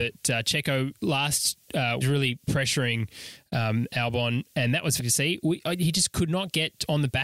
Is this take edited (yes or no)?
yes